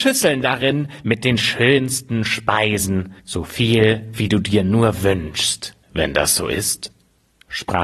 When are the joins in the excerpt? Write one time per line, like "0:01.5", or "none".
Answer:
0:03.2
0:05.8